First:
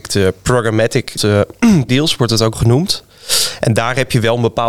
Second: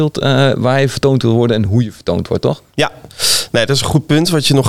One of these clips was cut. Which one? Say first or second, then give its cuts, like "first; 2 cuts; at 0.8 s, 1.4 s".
first; 3 cuts; at 1.2 s, 1.9 s, 2.5 s